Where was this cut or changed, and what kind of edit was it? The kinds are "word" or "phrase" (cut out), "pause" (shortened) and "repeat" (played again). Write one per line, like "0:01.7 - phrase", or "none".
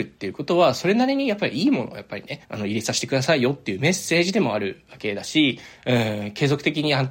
0:02.4 - pause